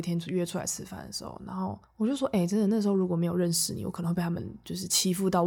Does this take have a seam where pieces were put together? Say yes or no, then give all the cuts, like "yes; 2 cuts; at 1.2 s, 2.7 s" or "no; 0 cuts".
yes; 1 cut; at 1.8 s